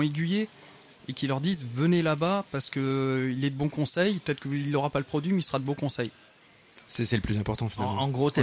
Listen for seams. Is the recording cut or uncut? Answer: uncut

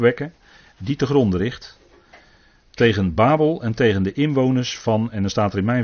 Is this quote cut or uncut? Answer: uncut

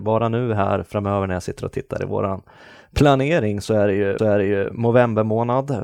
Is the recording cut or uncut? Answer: cut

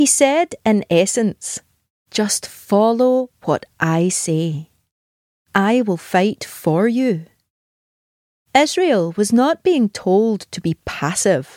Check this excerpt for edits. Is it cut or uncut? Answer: uncut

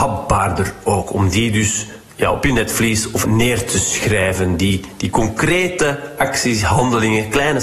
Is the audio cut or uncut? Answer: cut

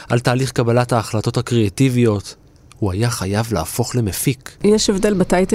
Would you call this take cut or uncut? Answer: uncut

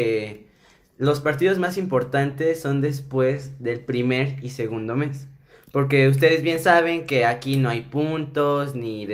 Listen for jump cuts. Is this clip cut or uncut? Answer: uncut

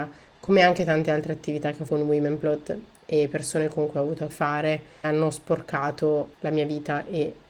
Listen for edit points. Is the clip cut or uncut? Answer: cut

